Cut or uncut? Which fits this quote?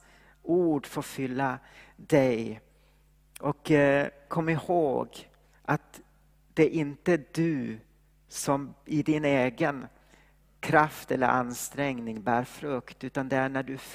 uncut